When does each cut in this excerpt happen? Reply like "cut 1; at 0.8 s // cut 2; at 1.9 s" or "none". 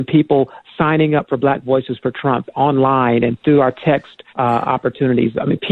cut 1; at 4.3 s

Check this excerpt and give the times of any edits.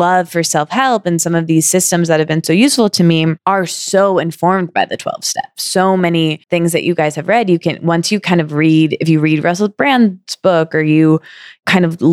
cut 1; at 6.4 s

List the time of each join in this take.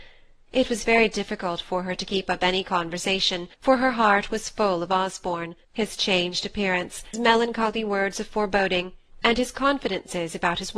cut 1; at 3.5 s // cut 2; at 5.6 s // cut 3; at 7.1 s

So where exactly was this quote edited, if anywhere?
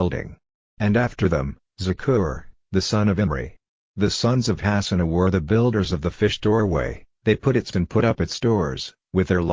cut 1; at 7.7 s

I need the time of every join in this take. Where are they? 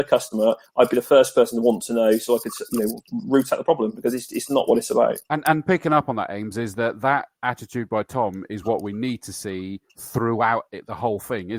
cut 1; at 5.2 s // cut 2; at 9.9 s

